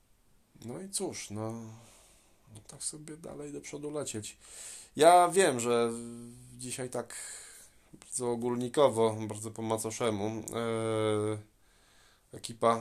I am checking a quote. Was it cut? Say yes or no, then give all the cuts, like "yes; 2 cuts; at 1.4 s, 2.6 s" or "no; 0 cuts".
no; 0 cuts